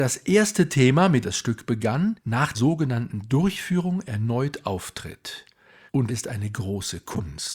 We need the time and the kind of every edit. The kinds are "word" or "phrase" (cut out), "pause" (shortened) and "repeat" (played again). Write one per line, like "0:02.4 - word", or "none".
0:01.2 - word
0:02.5 - word
0:06.1 - word